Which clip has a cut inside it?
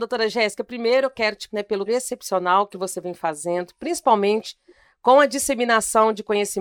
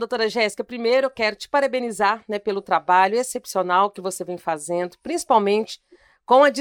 first; 2 cuts; at 1.5 s, 1.9 s

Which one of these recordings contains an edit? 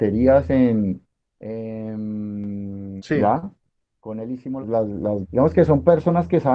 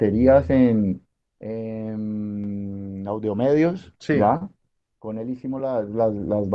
first; 3 cuts; at 3.0 s, 4.6 s, 5.2 s

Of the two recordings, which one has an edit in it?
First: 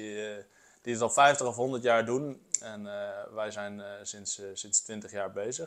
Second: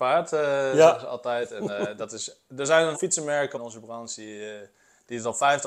second; 3 cuts; at 2.5 s, 2.9 s, 3.5 s

